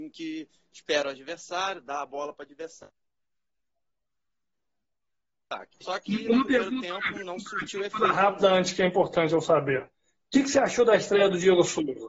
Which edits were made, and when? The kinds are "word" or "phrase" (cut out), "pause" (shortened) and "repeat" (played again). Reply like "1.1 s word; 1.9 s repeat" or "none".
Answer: 5.7 s pause; 7.1 s word